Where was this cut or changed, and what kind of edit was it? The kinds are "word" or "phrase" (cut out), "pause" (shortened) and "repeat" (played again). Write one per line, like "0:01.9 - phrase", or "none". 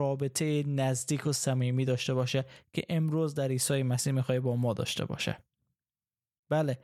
none